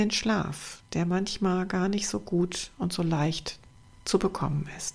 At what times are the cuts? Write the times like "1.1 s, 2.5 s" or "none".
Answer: none